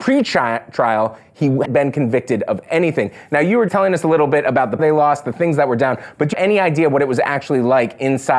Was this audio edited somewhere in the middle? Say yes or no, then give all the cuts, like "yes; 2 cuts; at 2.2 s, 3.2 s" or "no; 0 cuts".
yes; 4 cuts; at 1.6 s, 3.7 s, 4.8 s, 6.3 s